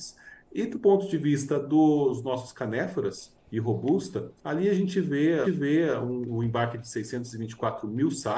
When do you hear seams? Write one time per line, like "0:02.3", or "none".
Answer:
0:03.5
0:04.4
0:05.4

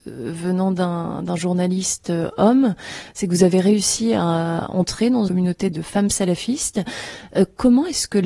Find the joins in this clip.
0:05.3
0:05.7

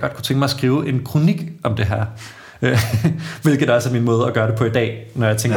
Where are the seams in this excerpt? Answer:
none

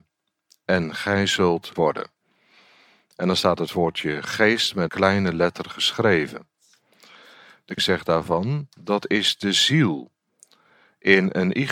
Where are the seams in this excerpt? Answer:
0:01.8
0:04.9
0:07.8

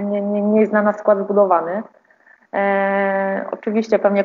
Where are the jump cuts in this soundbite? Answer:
none

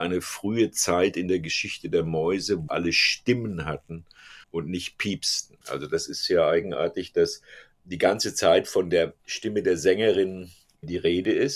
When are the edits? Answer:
0:02.7
0:04.4
0:05.6
0:09.2

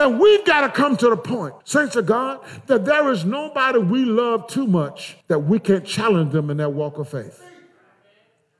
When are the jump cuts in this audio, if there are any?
0:01.6
0:05.2

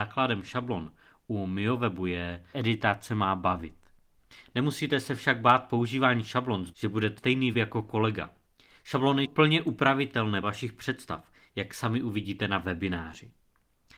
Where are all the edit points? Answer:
0:02.5
0:06.7
0:07.2
0:07.5
0:09.2
0:10.4

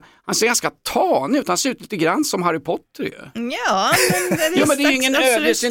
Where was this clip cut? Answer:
none

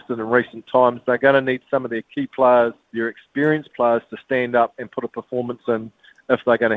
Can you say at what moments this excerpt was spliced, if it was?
0:02.8

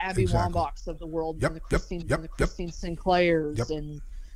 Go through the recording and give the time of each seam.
0:02.0

